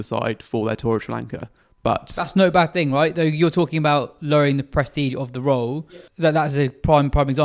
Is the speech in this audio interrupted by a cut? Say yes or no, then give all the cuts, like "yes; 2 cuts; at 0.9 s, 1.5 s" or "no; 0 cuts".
yes; 2 cuts; at 1.6 s, 6.1 s